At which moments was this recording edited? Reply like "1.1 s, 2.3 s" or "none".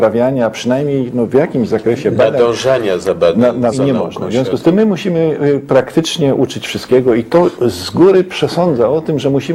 3.7 s

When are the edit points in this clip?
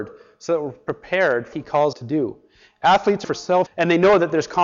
1.5 s, 1.9 s, 3.2 s, 3.7 s

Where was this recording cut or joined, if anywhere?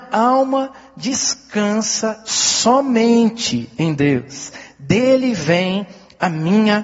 none

